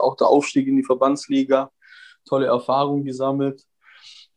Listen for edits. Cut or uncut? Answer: uncut